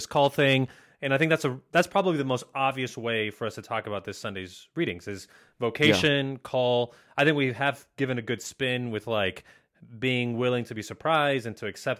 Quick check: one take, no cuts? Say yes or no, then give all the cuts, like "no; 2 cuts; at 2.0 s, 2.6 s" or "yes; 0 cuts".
yes; 0 cuts